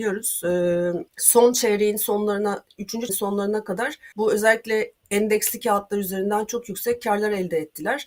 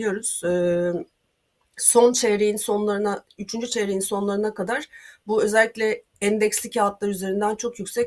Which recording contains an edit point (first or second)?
first